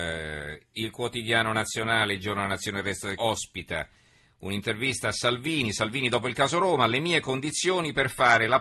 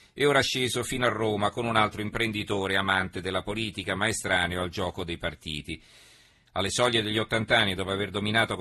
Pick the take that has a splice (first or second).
first